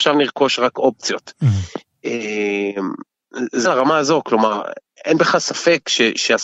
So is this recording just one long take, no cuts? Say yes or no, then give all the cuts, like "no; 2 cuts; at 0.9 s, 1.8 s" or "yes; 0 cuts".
no; 2 cuts; at 3.6 s, 5.0 s